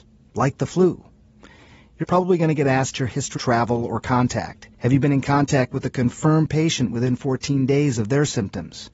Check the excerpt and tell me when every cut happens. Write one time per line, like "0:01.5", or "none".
0:02.0
0:02.9
0:03.4
0:04.7

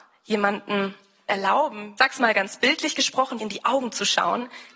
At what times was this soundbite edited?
0:01.3
0:02.0
0:03.4

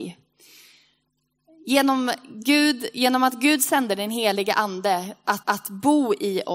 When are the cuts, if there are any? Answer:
0:05.4

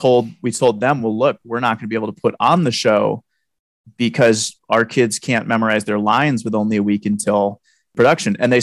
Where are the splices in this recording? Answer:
none

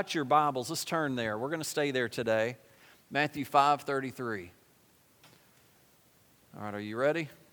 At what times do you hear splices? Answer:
none

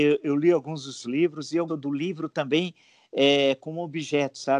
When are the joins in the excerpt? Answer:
0:01.0
0:01.7

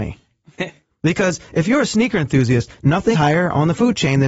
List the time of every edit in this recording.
0:03.1

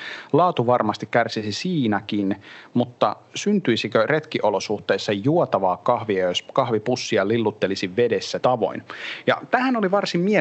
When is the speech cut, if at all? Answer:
0:08.4

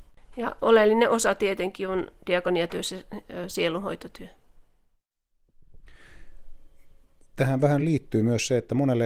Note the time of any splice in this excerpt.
none

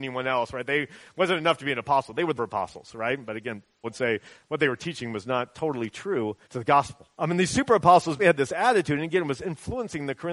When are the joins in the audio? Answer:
0:02.4
0:03.8
0:06.4
0:07.1
0:08.2

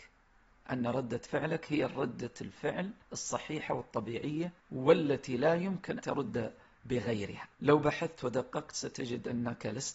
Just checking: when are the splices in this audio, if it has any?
0:03.0
0:04.6
0:06.0
0:07.5

